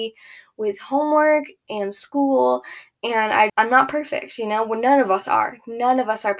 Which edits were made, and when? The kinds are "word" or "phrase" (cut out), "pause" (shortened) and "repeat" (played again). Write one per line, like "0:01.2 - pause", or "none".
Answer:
0:03.5 - word